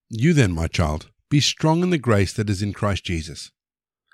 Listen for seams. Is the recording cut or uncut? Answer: cut